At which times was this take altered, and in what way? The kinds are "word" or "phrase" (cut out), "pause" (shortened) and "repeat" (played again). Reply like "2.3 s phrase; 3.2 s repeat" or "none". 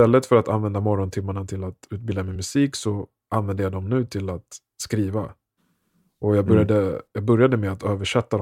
none